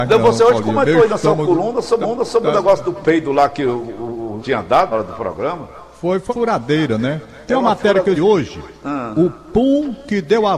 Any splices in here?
yes; 7 cuts; at 2.0 s, 4.4 s, 4.9 s, 5.9 s, 6.3 s, 8.2 s, 8.8 s

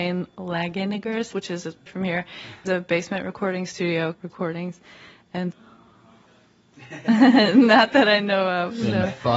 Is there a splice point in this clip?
yes; 5 cuts; at 1.3 s, 1.9 s, 2.7 s, 4.1 s, 5.5 s

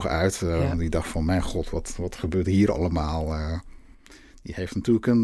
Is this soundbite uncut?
yes; 0 cuts

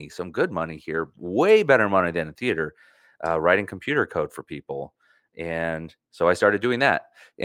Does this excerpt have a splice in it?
no; 0 cuts

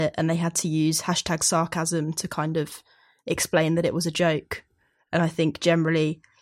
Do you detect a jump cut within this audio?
no; 0 cuts

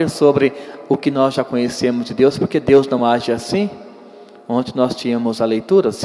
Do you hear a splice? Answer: no; 0 cuts

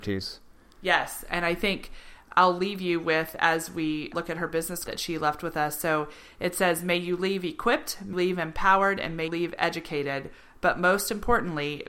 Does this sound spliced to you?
yes; 5 cuts; at 2.3 s, 4.1 s, 4.9 s, 8.1 s, 9.3 s

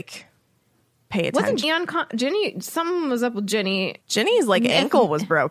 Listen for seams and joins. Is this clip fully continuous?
no; 2 cuts; at 1.6 s, 4.0 s

